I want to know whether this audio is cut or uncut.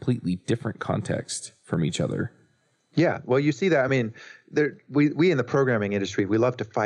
uncut